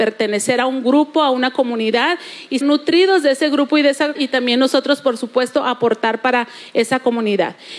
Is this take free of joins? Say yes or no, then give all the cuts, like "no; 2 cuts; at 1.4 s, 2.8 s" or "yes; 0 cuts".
no; 2 cuts; at 2.6 s, 4.2 s